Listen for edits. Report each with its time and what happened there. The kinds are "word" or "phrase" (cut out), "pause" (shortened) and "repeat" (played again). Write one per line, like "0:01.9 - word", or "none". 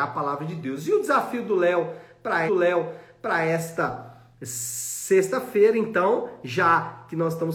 0:02.5 - repeat